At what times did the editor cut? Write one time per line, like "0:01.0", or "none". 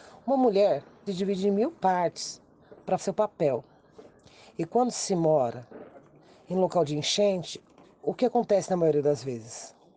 0:01.1
0:03.0